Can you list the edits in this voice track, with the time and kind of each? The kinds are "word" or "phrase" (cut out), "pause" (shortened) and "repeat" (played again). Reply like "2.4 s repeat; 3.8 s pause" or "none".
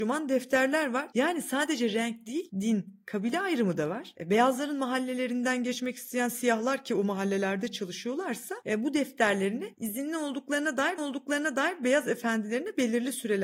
11.0 s repeat